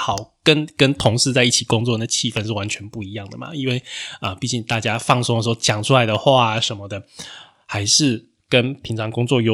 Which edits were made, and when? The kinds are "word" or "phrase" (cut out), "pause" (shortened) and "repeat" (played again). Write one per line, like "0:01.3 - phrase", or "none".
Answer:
none